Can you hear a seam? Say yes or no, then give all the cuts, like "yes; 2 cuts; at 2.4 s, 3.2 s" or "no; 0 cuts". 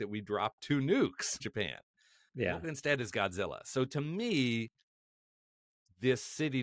yes; 2 cuts; at 1.4 s, 2.6 s